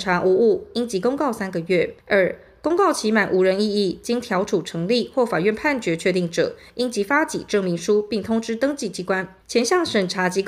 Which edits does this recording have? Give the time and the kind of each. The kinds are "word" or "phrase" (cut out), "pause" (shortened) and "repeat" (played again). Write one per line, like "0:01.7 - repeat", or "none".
0:02.0 - pause
0:09.4 - pause